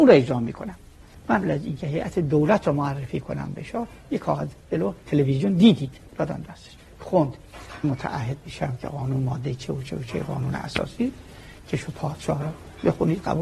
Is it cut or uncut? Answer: cut